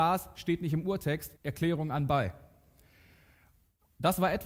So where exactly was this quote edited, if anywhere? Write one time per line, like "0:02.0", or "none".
0:01.4